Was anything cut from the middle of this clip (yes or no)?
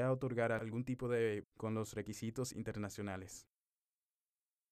yes